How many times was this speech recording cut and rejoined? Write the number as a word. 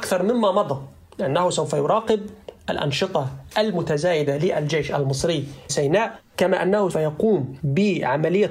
two